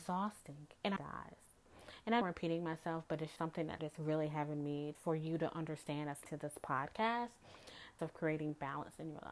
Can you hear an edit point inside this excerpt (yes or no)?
yes